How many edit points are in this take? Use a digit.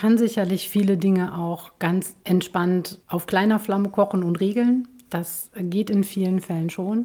0